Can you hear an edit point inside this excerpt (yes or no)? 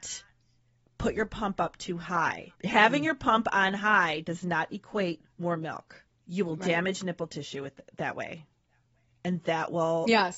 yes